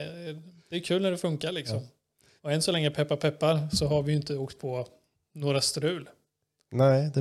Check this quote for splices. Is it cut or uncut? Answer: cut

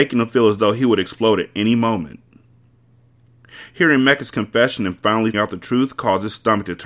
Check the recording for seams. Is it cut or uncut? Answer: cut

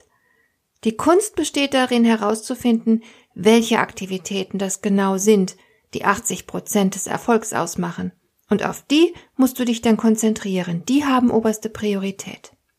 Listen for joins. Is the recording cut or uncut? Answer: uncut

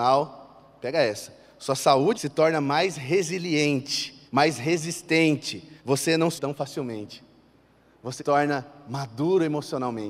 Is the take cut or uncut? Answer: cut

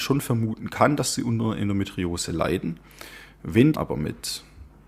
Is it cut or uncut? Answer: cut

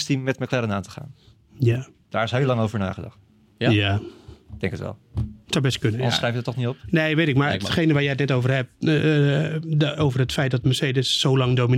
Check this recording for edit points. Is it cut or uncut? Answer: uncut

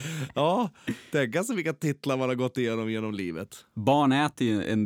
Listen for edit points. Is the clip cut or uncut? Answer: uncut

